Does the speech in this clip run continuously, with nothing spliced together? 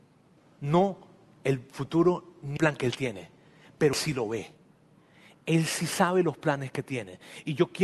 no; 2 cuts; at 2.6 s, 3.9 s

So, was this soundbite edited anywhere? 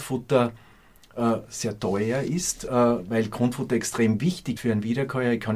yes; 1 cut; at 4.6 s

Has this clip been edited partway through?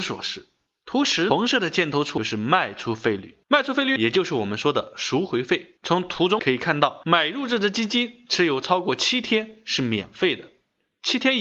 yes; 2 cuts; at 3.4 s, 5.8 s

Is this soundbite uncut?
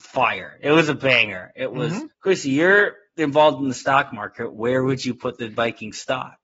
no; 1 cut; at 2.1 s

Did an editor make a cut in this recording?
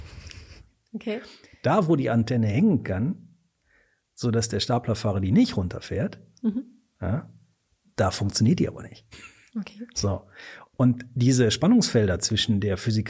no; 0 cuts

